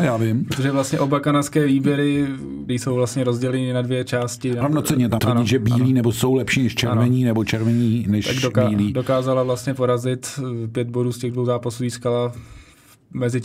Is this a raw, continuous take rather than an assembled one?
no; 3 cuts; at 2.7 s, 4.6 s, 5.2 s

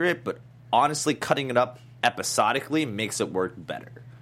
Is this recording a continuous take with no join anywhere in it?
yes; 0 cuts

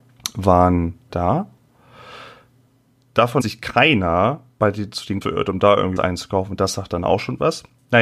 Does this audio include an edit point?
yes; 4 cuts; at 1.1 s, 3.4 s, 5.2 s, 6.0 s

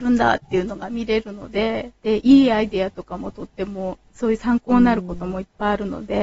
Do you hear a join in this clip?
yes; 1 cut; at 2.0 s

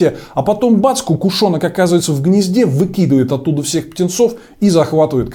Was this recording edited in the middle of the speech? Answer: no; 0 cuts

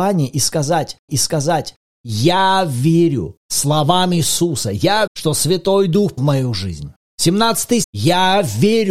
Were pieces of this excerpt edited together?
yes; 5 cuts; at 1.1 s, 3.4 s, 5.1 s, 6.2 s, 7.8 s

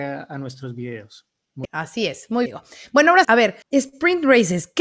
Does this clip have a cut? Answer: yes; 4 cuts; at 1.6 s, 2.5 s, 3.2 s, 3.6 s

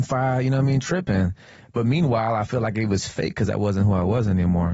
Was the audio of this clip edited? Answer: no; 0 cuts

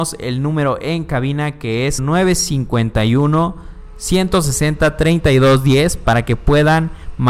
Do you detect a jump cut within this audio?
yes; 1 cut; at 2.0 s

